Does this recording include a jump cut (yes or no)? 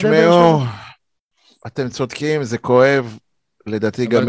no